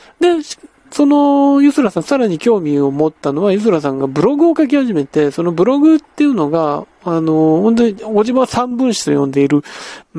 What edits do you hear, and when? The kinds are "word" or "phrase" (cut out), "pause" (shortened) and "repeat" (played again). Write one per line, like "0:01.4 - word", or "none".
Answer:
none